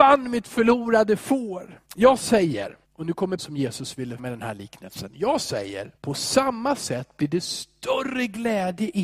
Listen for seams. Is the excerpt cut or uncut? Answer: cut